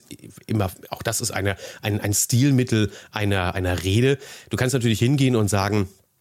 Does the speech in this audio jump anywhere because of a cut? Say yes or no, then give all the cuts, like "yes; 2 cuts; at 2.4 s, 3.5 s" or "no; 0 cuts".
no; 0 cuts